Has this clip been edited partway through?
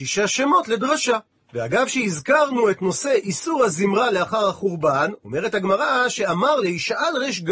no; 0 cuts

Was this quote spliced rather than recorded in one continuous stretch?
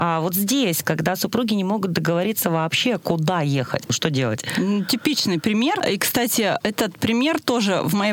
no; 0 cuts

